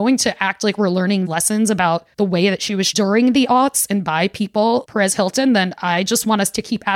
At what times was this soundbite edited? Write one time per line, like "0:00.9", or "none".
0:01.3
0:02.1
0:02.9
0:04.8